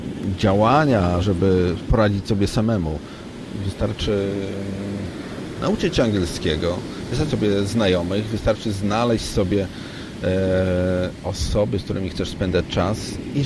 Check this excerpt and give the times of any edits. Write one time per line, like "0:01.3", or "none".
0:01.2
0:07.3